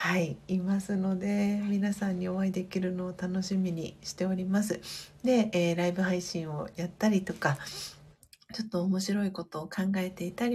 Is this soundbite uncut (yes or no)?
yes